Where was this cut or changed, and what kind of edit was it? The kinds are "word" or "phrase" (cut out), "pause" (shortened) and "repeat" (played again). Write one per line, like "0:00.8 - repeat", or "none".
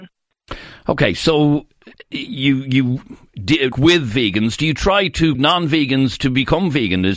0:02.0 - pause
0:03.7 - word
0:05.3 - word